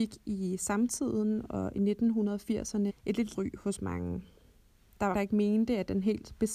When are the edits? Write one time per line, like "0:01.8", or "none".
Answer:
0:02.9
0:03.3
0:05.1